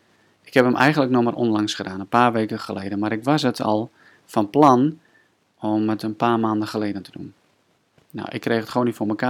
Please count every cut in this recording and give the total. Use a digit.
0